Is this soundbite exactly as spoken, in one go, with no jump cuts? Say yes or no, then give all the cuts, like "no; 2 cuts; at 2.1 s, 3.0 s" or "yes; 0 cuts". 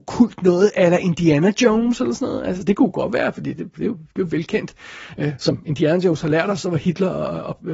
yes; 0 cuts